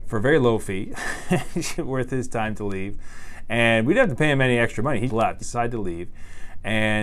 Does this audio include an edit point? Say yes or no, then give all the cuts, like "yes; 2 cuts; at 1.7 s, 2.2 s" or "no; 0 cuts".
yes; 3 cuts; at 1.8 s, 5.1 s, 5.4 s